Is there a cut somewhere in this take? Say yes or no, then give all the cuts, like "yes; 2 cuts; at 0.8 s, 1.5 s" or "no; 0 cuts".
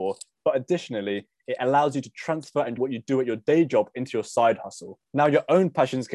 yes; 2 cuts; at 2.8 s, 5.1 s